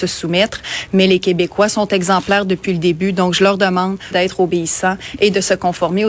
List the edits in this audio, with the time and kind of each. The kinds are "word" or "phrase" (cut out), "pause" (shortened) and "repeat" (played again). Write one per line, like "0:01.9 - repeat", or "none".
0:04.1 - phrase